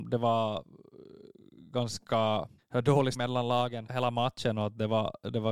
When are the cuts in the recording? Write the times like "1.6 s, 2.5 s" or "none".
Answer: 2.6 s, 3.1 s, 3.9 s